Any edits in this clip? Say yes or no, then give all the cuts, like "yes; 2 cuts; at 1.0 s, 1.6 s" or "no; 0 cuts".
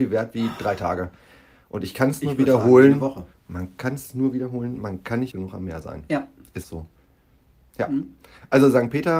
yes; 2 cuts; at 5.3 s, 6.6 s